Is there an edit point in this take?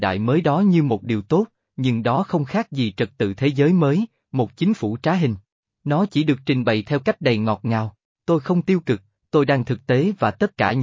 no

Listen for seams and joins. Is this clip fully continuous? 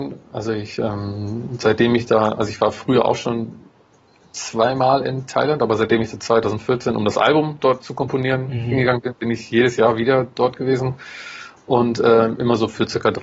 yes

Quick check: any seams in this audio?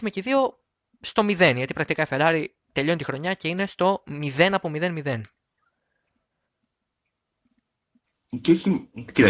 no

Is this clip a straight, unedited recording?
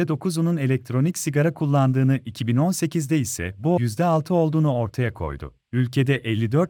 no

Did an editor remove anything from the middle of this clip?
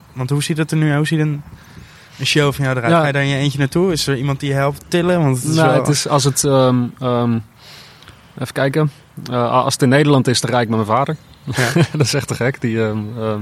no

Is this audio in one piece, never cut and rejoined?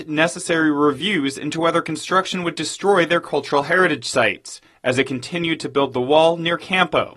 yes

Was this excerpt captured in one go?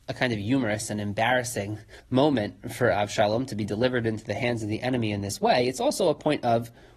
no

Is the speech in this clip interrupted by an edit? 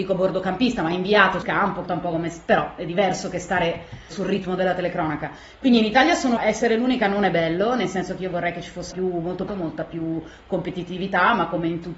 yes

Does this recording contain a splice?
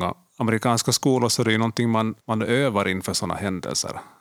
yes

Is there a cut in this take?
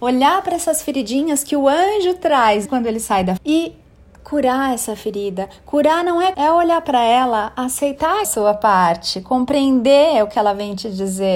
yes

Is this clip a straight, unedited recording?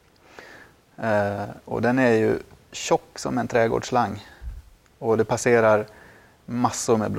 yes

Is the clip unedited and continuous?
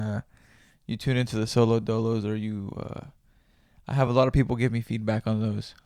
yes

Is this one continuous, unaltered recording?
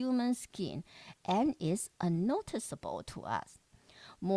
yes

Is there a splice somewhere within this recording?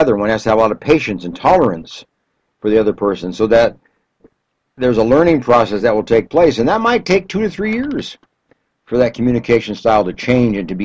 no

